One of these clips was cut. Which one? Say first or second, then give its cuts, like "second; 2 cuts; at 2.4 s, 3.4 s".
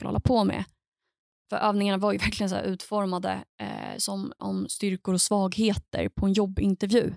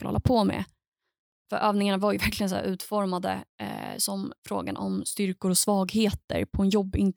first; 1 cut; at 4.4 s